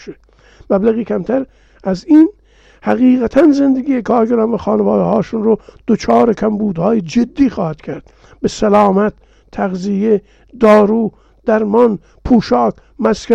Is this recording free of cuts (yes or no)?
yes